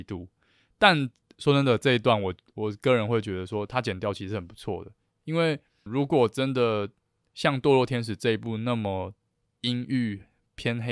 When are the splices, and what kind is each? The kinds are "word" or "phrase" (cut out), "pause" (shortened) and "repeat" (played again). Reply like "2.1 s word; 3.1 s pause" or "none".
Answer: 5.9 s word

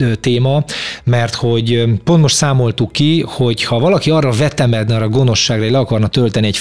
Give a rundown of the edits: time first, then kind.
none

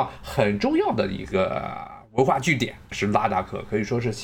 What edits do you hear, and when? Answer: 2.8 s pause

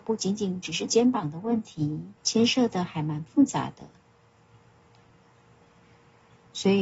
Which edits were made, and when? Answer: 2.2 s pause

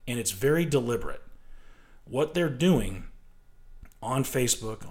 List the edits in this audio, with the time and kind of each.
none

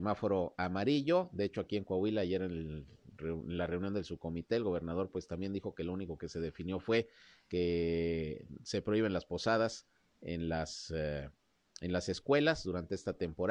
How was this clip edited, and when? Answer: none

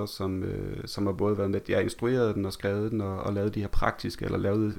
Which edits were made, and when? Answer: none

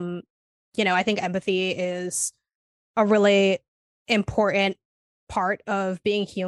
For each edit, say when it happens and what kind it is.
none

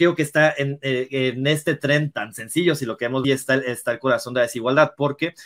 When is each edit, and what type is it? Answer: 2.1 s word; 3.2 s word

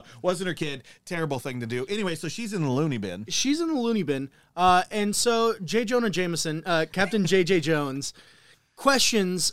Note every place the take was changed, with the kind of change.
none

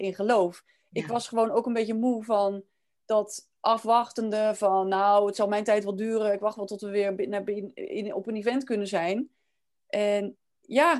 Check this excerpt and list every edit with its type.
none

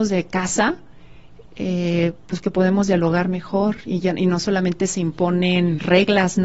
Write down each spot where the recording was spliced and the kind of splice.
none

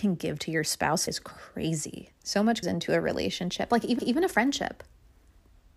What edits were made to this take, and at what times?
1.1 s word; 2.2 s pause; 2.6 s word; 4.0 s repeat

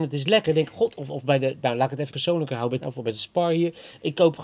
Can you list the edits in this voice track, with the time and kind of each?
2.1 s word; 2.8 s phrase

